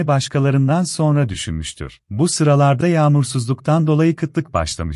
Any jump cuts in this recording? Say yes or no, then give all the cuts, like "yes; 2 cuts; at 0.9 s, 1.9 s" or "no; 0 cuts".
yes; 2 cuts; at 2.1 s, 2.8 s